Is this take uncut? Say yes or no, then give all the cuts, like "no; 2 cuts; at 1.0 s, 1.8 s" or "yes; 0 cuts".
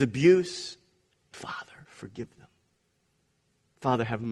no; 1 cut; at 1.3 s